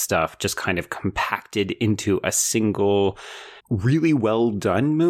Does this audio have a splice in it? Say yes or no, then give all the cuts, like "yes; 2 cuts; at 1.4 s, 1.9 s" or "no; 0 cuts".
yes; 1 cut; at 3.6 s